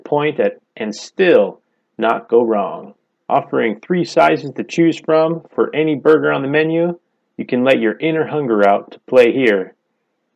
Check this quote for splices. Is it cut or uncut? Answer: cut